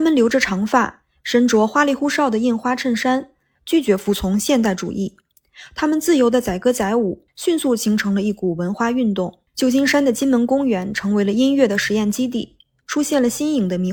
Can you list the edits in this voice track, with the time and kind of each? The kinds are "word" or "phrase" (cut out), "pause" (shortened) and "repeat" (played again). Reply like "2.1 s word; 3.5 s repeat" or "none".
3.6 s phrase; 7.3 s pause; 9.5 s pause